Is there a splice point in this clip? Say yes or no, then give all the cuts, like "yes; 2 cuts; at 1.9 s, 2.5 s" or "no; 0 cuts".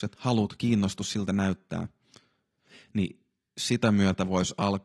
no; 0 cuts